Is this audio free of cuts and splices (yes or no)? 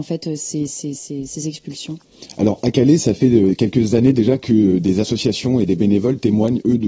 yes